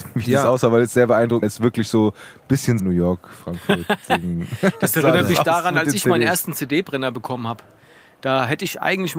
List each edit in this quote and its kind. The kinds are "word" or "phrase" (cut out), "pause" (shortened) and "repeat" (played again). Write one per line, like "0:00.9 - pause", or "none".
0:01.4 - word
0:02.8 - word